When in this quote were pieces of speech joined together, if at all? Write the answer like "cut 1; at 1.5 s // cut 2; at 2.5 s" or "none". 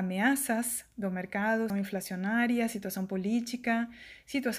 cut 1; at 1.7 s

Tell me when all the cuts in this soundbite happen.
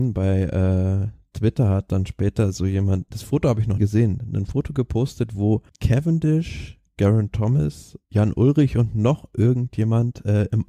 cut 1; at 3.1 s // cut 2; at 3.8 s // cut 3; at 5.7 s // cut 4; at 8.0 s

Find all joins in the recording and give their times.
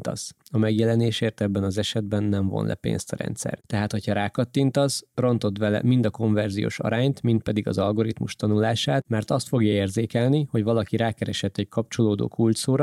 none

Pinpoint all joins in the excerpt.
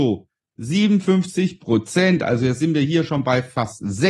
none

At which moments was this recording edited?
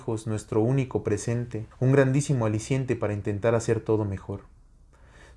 cut 1; at 1.7 s

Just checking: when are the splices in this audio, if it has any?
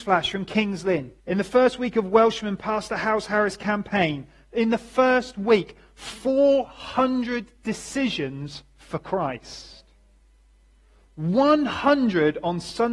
cut 1; at 1.2 s

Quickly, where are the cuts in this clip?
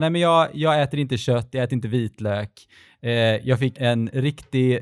cut 1; at 3.7 s

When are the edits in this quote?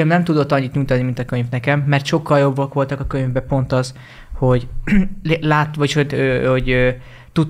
none

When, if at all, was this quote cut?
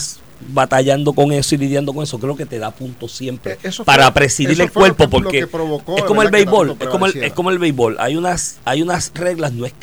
cut 1; at 8.6 s

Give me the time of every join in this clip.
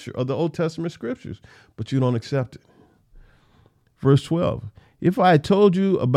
none

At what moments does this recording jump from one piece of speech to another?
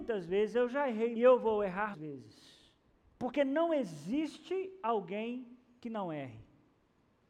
cut 1; at 1.1 s // cut 2; at 1.9 s // cut 3; at 2.9 s

